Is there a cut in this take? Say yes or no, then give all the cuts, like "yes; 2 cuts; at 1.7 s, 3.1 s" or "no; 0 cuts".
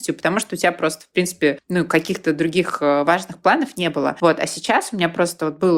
no; 0 cuts